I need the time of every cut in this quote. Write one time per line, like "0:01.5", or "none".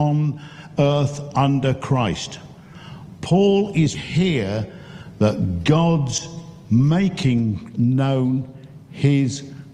0:03.9